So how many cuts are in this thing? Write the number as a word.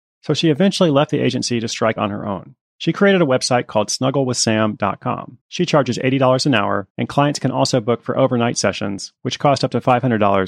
four